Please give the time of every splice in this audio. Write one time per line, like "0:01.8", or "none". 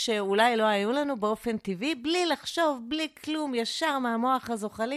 none